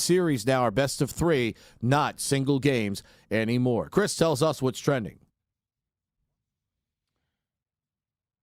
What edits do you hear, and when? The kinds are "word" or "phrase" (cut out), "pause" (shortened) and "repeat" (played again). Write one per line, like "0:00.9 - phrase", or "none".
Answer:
none